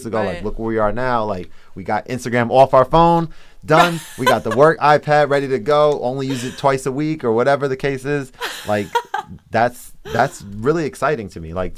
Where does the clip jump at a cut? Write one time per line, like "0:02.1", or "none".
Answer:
none